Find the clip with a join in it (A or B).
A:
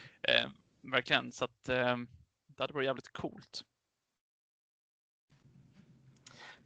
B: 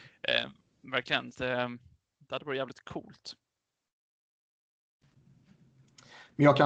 B